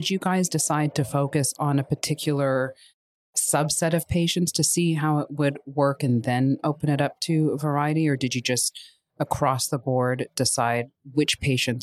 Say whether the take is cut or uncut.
uncut